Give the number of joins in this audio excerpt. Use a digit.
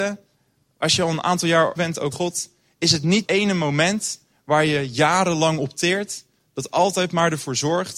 3